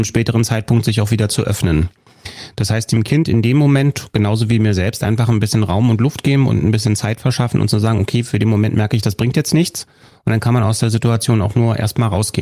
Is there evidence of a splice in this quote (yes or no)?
no